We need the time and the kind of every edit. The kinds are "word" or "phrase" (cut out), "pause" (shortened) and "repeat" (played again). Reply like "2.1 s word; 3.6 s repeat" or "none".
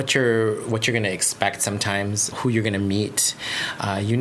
2.3 s word